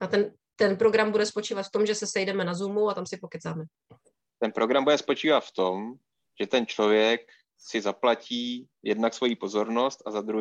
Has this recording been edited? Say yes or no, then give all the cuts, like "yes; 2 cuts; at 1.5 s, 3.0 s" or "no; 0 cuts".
no; 0 cuts